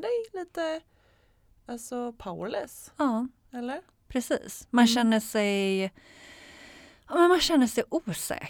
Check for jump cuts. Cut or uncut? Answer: uncut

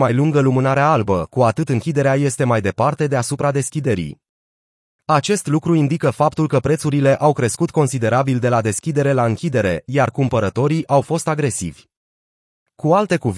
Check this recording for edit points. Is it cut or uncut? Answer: uncut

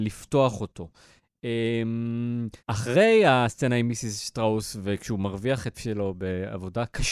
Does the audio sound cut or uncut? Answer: cut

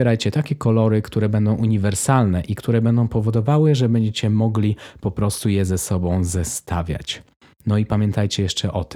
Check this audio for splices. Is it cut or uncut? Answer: uncut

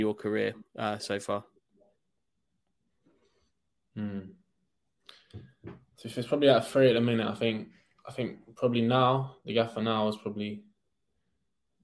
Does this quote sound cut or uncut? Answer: uncut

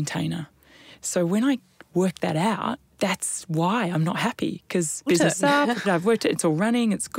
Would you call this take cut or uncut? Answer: cut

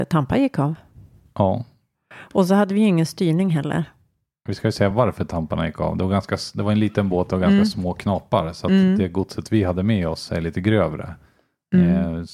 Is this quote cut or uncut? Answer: uncut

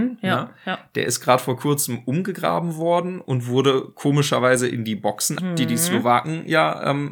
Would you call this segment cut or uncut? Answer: cut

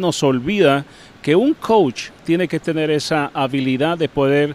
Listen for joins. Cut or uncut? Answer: uncut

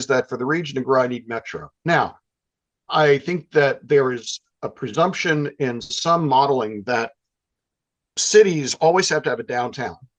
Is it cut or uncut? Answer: uncut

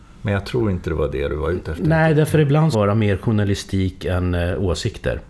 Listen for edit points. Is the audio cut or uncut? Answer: cut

